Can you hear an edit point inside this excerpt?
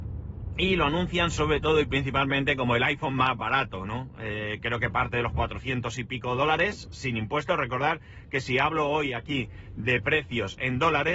no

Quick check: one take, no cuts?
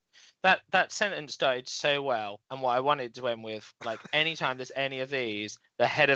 no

